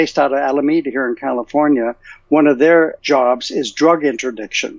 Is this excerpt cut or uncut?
cut